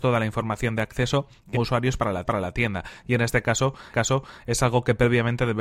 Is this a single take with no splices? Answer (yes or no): no